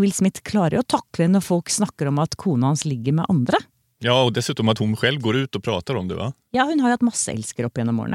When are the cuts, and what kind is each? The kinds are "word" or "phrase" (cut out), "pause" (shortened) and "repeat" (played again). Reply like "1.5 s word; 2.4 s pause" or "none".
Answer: none